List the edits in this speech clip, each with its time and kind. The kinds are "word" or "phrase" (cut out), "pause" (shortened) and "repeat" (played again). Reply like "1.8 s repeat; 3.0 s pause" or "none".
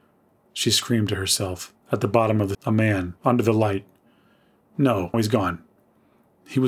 1.8 s pause; 2.5 s word; 3.2 s pause; 5.1 s word